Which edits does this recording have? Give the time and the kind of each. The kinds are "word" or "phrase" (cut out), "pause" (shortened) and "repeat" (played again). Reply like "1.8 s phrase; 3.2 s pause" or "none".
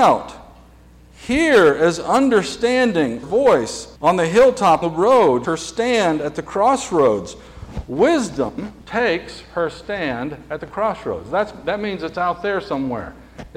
3.2 s phrase; 4.0 s pause; 4.8 s word; 5.4 s phrase; 8.8 s pause